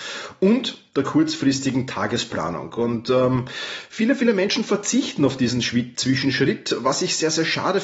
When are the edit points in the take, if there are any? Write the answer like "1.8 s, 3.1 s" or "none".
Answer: none